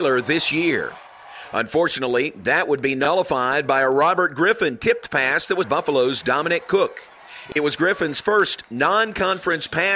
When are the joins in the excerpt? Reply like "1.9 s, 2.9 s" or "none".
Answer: 5.6 s